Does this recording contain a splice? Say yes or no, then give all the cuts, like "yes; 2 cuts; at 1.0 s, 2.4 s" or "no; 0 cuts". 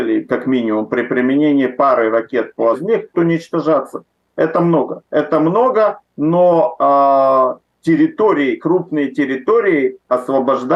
yes; 2 cuts; at 2.7 s, 3.1 s